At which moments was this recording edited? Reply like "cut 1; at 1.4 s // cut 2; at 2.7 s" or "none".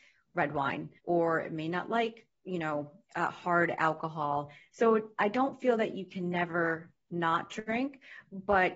cut 1; at 1.0 s

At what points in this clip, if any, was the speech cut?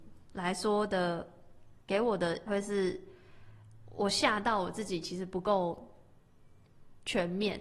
cut 1; at 2.5 s

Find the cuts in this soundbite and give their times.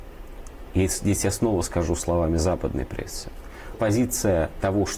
cut 1; at 3.7 s

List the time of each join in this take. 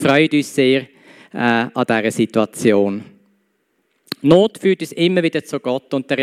none

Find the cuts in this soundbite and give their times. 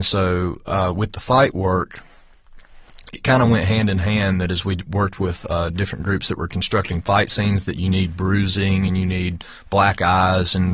none

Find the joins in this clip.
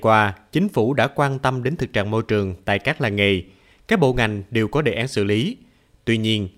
none

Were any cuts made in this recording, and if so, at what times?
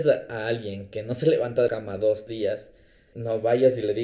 cut 1; at 1.7 s // cut 2; at 2.3 s // cut 3; at 3.1 s

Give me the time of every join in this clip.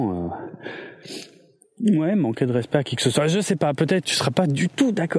cut 1; at 4.1 s

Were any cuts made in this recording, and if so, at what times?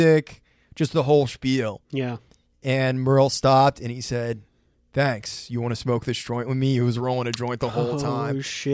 none

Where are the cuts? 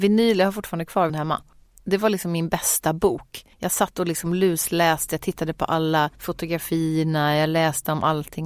cut 1; at 1.1 s // cut 2; at 3.5 s // cut 3; at 6.1 s

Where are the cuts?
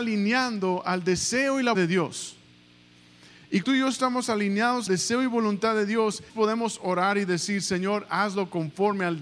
cut 1; at 1.7 s // cut 2; at 3.6 s // cut 3; at 4.9 s // cut 4; at 6.3 s

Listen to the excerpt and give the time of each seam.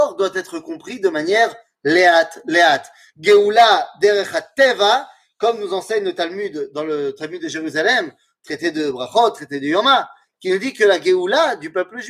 none

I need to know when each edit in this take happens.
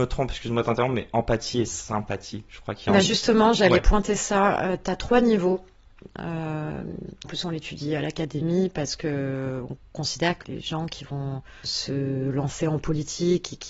cut 1; at 7.2 s // cut 2; at 10.4 s // cut 3; at 11.6 s

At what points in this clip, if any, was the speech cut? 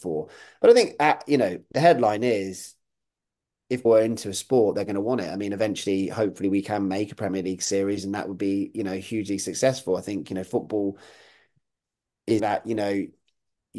cut 1; at 3.9 s // cut 2; at 12.4 s

